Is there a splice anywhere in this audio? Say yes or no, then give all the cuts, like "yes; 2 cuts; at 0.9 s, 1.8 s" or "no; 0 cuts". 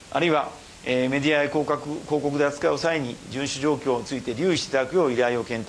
no; 0 cuts